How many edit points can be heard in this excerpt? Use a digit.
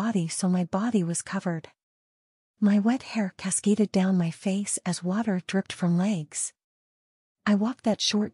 0